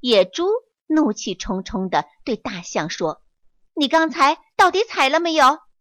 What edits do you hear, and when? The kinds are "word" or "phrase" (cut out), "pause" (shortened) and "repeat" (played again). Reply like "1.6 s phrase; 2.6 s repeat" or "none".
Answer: 3.3 s pause